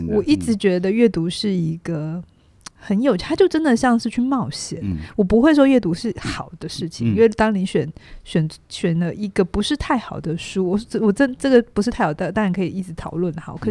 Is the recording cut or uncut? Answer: cut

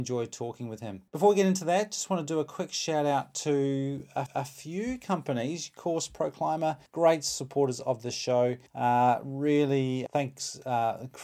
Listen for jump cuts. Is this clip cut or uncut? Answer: cut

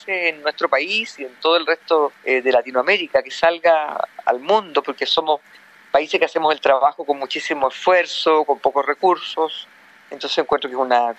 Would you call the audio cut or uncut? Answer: cut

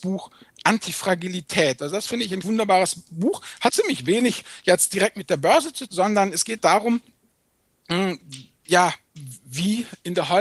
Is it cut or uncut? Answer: cut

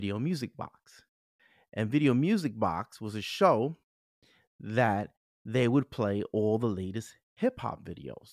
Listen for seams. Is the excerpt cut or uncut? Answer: uncut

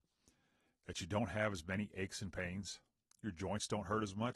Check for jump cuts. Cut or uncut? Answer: uncut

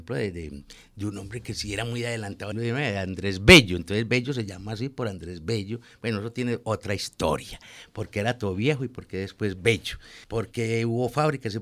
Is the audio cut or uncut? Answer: cut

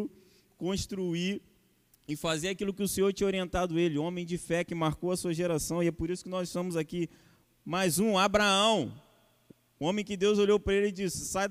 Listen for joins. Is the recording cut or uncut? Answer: uncut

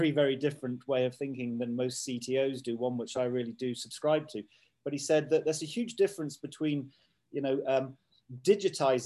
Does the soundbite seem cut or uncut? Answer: uncut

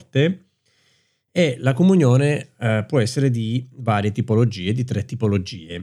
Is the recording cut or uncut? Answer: uncut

